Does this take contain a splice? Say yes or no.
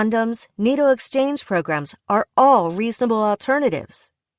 yes